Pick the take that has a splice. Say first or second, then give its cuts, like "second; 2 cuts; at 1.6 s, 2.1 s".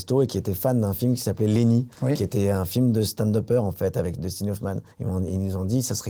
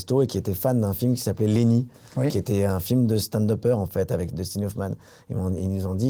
first; 2 cuts; at 1.9 s, 4.9 s